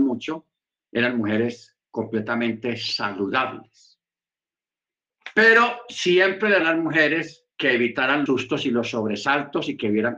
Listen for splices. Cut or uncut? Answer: cut